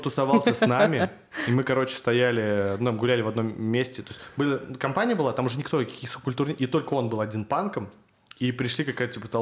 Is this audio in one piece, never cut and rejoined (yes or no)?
yes